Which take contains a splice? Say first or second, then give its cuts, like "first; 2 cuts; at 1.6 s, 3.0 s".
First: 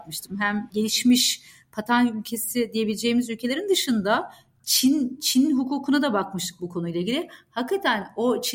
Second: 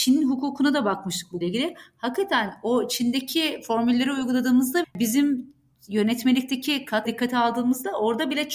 second; 3 cuts; at 1.4 s, 4.8 s, 7.0 s